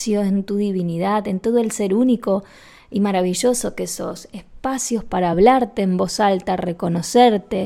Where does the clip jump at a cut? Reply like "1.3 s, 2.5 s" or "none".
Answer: none